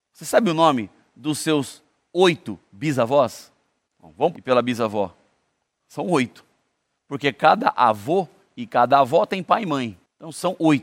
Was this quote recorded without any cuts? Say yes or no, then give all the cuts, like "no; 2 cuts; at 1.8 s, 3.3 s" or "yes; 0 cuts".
no; 1 cut; at 4.3 s